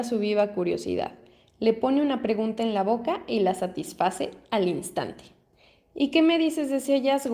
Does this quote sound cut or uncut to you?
uncut